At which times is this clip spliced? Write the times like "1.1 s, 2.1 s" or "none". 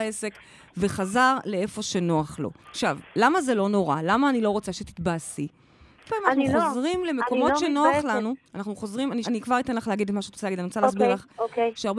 2.6 s, 6.1 s, 8.5 s, 9.2 s

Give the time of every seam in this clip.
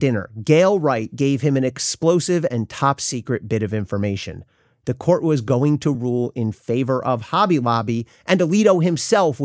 none

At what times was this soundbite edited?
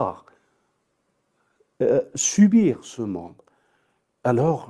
none

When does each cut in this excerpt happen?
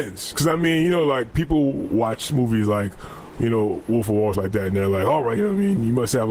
4.3 s, 5.4 s

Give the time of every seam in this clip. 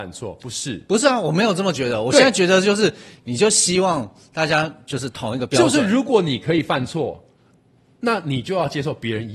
none

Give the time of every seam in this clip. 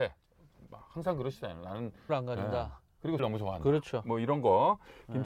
2.1 s, 3.2 s

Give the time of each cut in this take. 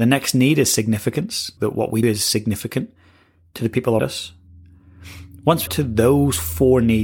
1.6 s, 2.0 s, 4.0 s, 5.7 s

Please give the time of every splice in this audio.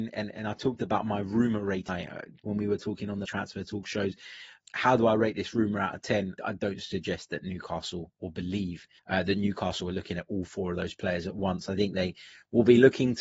1.9 s, 3.2 s, 4.6 s, 6.4 s, 9.0 s

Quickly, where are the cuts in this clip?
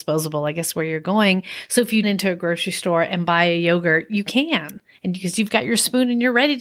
2.0 s

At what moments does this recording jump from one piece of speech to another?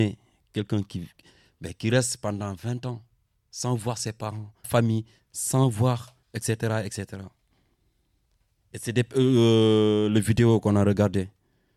4.6 s, 6.2 s

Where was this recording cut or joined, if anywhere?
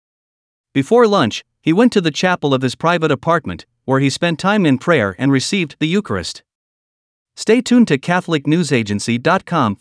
none

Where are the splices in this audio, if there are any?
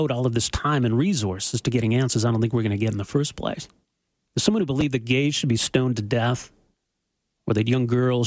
none

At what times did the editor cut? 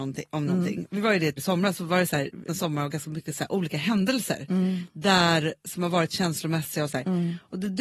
1.4 s, 2.5 s

